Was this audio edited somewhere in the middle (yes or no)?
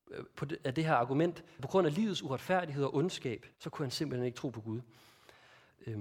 yes